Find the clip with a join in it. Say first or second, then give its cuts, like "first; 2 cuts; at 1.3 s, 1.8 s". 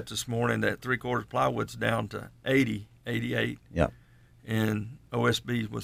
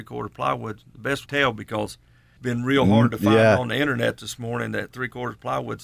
second; 2 cuts; at 1.3 s, 2.4 s